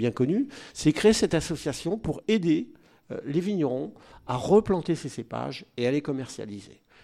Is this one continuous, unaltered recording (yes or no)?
yes